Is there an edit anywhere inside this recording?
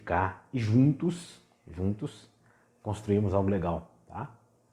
no; 0 cuts

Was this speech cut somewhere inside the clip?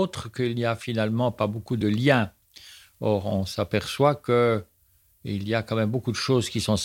no; 0 cuts

